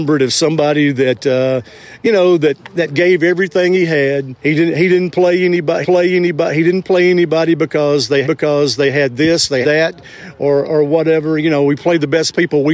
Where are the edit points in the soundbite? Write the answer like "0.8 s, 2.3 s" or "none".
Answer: 4.4 s, 5.8 s, 8.2 s, 9.6 s